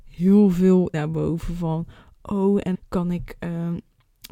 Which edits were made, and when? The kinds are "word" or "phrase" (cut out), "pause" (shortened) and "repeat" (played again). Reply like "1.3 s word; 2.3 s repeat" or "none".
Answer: 0.9 s word; 2.7 s word